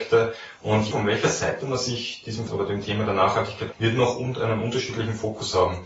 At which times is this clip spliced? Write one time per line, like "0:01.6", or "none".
0:00.9
0:02.5
0:03.7